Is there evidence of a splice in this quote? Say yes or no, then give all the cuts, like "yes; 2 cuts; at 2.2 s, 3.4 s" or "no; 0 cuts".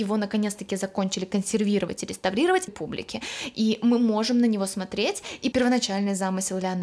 yes; 2 cuts; at 2.7 s, 5.5 s